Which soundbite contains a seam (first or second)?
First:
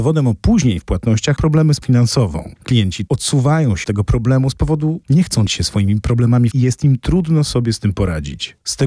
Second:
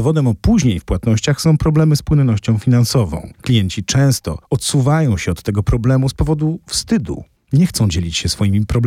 first